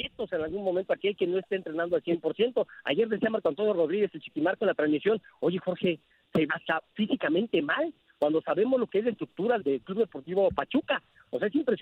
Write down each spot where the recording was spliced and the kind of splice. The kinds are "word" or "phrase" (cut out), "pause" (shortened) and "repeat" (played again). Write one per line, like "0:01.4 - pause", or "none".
0:06.5 - word
0:09.6 - word